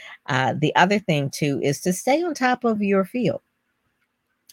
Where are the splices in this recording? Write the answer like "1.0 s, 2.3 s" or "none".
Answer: none

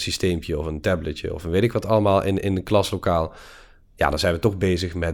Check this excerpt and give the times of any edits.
none

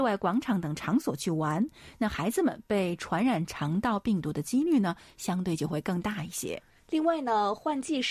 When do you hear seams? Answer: 6.8 s

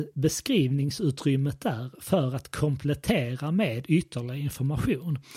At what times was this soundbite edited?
none

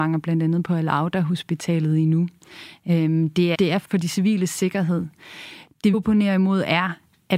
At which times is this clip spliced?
3.5 s, 3.8 s, 5.9 s

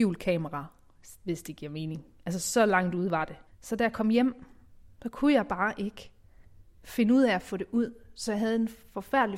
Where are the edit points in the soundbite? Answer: 3.5 s

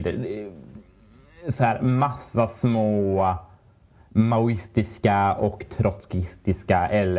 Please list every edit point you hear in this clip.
none

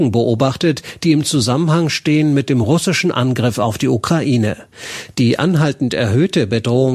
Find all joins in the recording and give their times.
none

